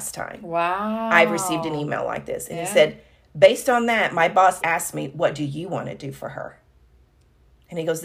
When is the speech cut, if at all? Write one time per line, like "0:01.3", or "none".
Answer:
0:04.6